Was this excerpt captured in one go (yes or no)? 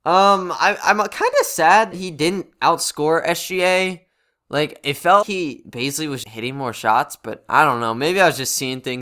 no